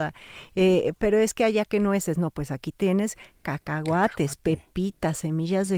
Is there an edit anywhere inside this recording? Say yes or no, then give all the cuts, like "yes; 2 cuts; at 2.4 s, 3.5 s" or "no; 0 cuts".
no; 0 cuts